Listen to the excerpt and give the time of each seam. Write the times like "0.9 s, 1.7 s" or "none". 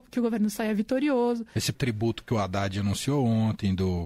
1.7 s